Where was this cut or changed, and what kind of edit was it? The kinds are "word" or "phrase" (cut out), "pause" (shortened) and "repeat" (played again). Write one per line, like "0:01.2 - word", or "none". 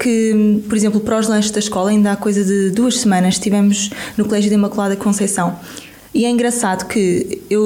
none